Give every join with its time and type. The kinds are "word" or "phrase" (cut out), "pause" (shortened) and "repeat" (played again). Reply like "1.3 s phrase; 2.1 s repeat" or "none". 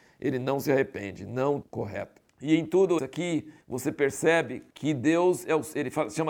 1.6 s phrase; 2.3 s pause; 3.0 s word; 3.6 s pause; 4.7 s pause